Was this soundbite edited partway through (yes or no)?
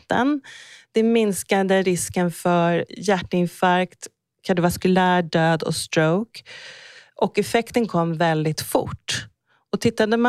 no